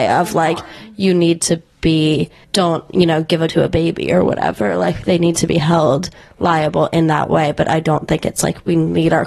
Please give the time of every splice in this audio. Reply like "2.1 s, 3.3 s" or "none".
2.4 s, 3.5 s